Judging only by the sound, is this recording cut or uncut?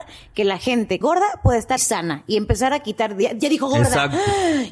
cut